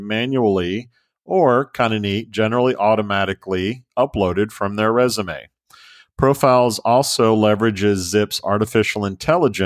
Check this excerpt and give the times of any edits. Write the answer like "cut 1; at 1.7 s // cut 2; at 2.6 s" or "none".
none